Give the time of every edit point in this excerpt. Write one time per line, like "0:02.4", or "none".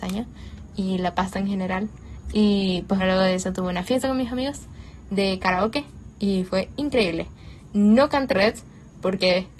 0:03.0
0:08.3